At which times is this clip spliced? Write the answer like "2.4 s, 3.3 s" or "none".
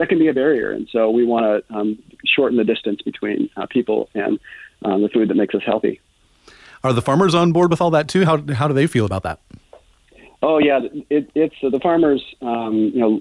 none